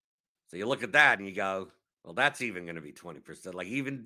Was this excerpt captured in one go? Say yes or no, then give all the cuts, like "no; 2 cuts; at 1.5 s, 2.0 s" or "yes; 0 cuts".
no; 1 cut; at 1.8 s